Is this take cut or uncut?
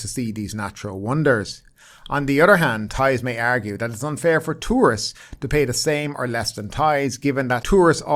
uncut